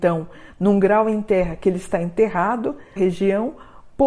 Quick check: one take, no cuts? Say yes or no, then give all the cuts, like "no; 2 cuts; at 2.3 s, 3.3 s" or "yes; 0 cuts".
no; 1 cut; at 3.0 s